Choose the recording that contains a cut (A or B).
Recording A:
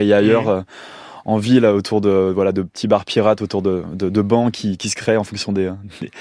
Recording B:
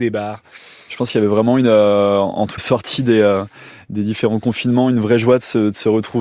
B